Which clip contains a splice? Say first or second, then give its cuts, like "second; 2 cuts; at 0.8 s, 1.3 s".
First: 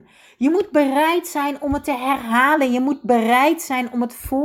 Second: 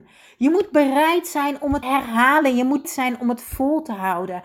second; 2 cuts; at 1.8 s, 2.8 s